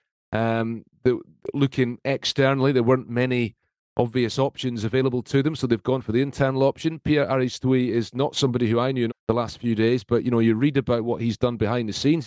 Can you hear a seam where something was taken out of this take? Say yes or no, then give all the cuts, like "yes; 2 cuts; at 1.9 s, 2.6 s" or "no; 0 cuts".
yes; 1 cut; at 9.1 s